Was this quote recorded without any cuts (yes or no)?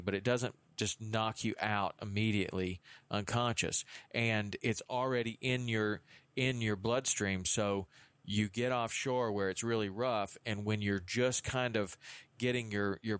yes